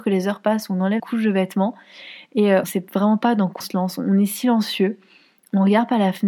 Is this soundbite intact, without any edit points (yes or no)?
no